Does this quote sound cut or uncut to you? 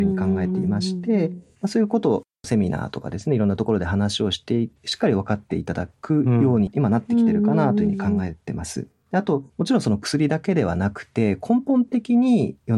cut